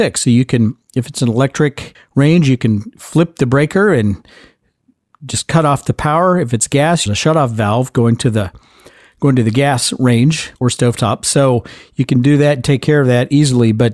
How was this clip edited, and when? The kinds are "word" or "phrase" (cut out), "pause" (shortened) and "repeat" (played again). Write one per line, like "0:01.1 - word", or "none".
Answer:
0:01.9 - pause
0:07.1 - phrase
0:10.6 - pause